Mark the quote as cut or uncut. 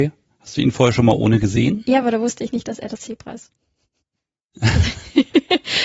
uncut